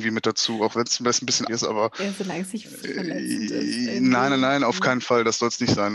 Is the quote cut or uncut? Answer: cut